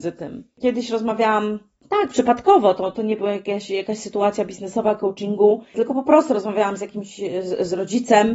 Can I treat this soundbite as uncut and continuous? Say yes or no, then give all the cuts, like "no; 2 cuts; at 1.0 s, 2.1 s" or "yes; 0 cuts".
yes; 0 cuts